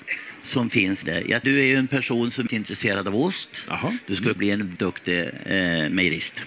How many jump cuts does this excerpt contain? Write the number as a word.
five